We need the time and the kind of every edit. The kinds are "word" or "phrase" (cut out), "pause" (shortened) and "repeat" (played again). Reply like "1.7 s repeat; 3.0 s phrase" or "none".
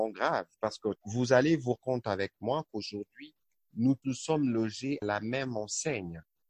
1.0 s word; 1.8 s word; 4.0 s word; 5.0 s word

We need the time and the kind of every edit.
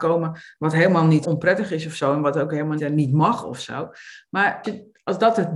1.2 s word; 2.8 s word; 4.6 s word

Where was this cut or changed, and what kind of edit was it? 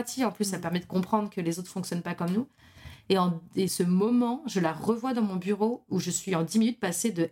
3.7 s word

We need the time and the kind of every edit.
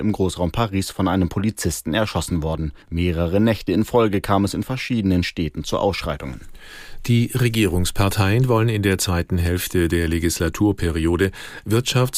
2.8 s pause

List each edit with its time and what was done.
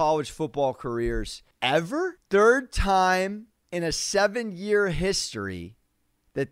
none

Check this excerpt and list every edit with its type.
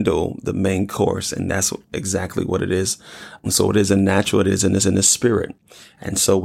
3.4 s word; 4.8 s repeat

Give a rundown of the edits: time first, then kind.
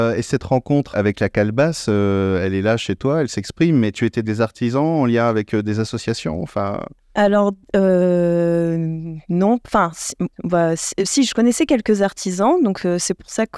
0.9 s word; 4.2 s phrase; 10.3 s pause

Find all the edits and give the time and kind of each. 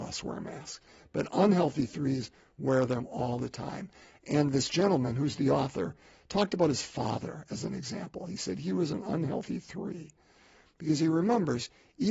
none

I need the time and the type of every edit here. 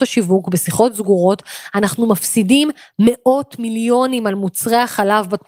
none

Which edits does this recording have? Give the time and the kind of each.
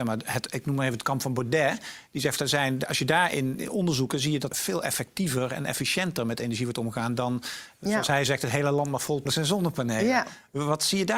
2.4 s word; 4.5 s word; 9.3 s phrase

